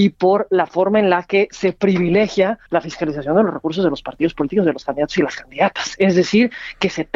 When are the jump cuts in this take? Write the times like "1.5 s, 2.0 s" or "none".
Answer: 2.7 s